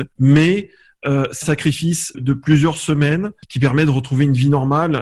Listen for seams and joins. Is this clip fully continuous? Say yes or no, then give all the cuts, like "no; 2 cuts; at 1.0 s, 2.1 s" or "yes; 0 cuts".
no; 2 cuts; at 1.4 s, 2.1 s